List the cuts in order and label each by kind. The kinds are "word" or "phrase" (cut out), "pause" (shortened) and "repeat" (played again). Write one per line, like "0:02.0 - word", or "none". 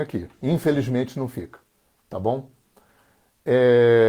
none